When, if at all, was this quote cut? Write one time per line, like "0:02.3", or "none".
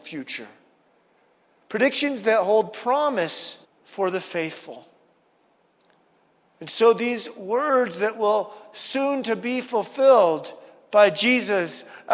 0:03.6